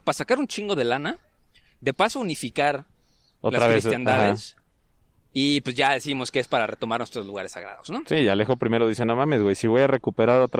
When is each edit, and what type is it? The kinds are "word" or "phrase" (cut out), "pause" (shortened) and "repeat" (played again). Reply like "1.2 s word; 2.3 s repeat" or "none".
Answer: none